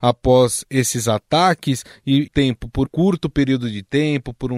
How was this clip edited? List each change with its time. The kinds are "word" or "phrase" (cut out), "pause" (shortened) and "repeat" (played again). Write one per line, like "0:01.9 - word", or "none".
0:02.3 - phrase
0:02.8 - word